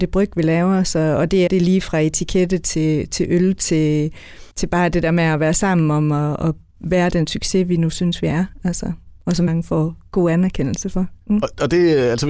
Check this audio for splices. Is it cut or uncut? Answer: cut